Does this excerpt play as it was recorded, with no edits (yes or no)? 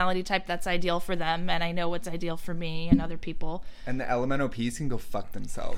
yes